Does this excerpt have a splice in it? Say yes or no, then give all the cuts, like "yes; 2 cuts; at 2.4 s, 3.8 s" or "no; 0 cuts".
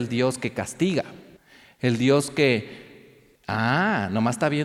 yes; 2 cuts; at 1.4 s, 3.3 s